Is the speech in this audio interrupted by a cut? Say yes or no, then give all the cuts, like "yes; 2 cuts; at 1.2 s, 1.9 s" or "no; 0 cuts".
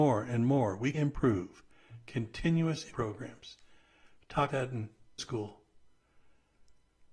yes; 4 cuts; at 0.9 s, 2.9 s, 4.5 s, 5.2 s